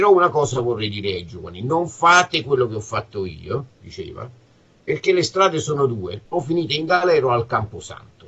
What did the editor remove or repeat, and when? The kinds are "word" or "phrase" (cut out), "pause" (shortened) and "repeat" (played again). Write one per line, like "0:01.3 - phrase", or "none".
0:06.2 - pause